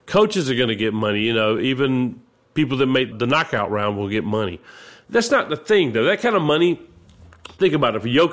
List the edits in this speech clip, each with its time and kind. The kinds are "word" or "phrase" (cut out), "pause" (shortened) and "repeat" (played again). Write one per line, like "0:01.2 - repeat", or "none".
none